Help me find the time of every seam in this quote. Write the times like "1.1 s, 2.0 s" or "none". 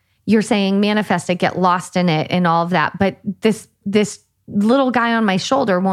none